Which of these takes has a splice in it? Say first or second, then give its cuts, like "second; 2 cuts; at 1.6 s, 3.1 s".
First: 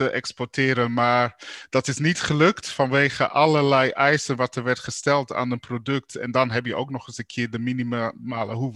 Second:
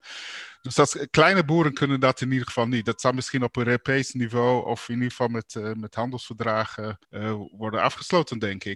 second; 1 cut; at 7.0 s